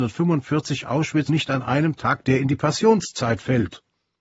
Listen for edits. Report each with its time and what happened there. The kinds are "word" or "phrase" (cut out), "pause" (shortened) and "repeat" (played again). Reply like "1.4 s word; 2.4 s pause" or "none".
1.3 s word; 2.2 s word